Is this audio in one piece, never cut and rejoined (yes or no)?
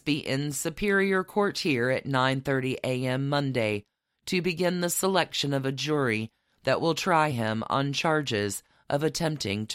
yes